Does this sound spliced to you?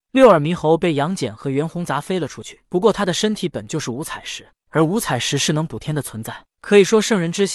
yes; 1 cut; at 2.6 s

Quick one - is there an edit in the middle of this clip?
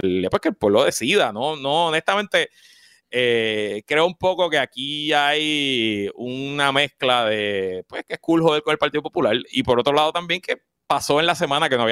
no; 0 cuts

